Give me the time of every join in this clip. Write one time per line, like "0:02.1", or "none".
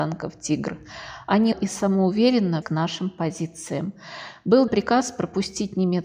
0:01.5
0:02.6
0:04.7